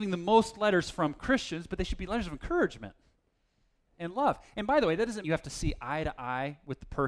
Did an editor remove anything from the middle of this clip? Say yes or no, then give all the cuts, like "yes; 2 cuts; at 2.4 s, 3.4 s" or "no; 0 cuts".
yes; 1 cut; at 5.2 s